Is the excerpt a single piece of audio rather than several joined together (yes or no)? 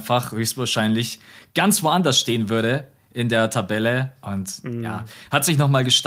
yes